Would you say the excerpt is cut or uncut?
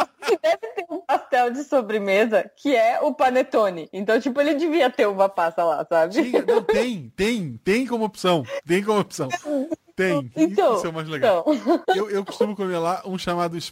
uncut